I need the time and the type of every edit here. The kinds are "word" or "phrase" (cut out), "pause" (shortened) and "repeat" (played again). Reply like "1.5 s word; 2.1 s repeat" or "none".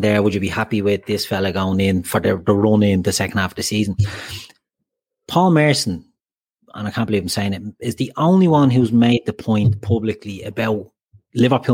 none

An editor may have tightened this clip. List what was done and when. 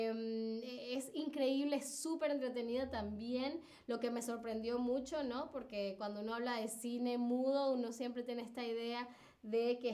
none

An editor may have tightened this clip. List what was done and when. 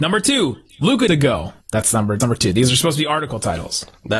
1.1 s phrase; 1.6 s pause; 2.2 s word

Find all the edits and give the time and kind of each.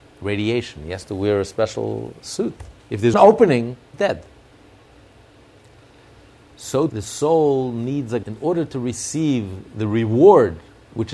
2.8 s pause; 3.1 s word; 3.9 s word; 6.9 s word; 8.2 s word

